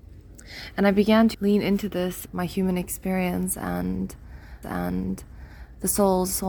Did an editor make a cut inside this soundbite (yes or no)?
yes